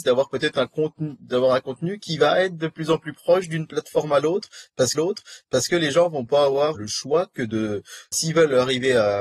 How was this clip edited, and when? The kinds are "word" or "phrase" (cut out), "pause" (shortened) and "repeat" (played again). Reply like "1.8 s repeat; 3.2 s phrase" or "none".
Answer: 4.9 s repeat; 6.7 s word; 8.1 s word